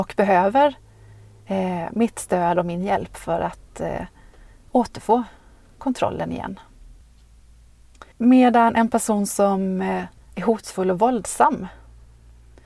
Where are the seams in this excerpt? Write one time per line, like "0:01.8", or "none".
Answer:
0:08.1
0:10.2